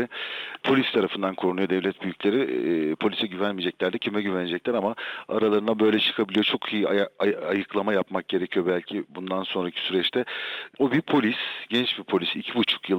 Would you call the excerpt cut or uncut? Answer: uncut